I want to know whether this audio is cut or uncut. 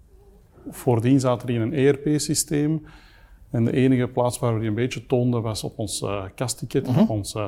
uncut